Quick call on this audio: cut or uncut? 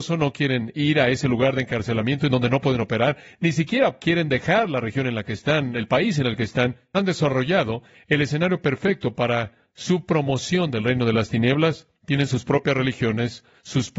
uncut